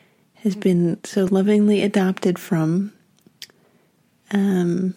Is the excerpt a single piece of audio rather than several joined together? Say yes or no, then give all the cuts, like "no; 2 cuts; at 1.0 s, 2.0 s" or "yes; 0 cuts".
yes; 0 cuts